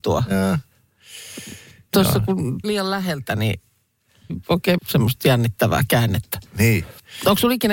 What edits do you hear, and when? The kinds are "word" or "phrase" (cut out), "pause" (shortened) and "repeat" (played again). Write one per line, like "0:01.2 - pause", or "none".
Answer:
0:02.6 - word
0:04.3 - word
0:04.8 - word